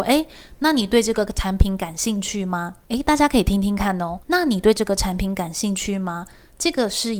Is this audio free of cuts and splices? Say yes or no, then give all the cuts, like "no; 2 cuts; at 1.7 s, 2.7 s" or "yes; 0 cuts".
no; 2 cuts; at 2.8 s, 4.2 s